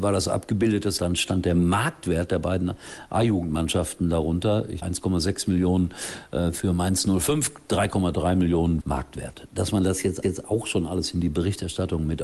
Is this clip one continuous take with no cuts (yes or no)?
no